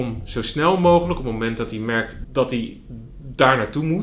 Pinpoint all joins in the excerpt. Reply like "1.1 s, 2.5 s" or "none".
2.2 s